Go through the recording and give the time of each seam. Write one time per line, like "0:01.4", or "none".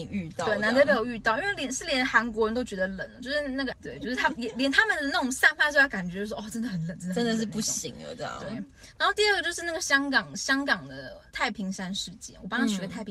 0:11.3